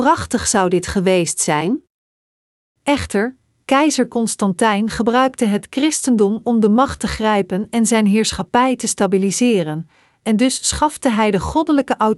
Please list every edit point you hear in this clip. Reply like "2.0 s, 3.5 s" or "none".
none